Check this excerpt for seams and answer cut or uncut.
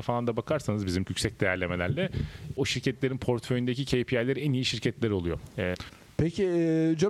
cut